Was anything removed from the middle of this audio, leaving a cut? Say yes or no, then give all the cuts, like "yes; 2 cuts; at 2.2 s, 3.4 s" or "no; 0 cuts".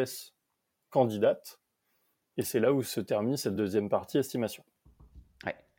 no; 0 cuts